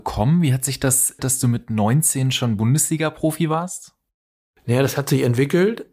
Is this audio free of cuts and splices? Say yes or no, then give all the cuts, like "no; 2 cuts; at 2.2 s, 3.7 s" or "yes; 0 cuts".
no; 1 cut; at 1.2 s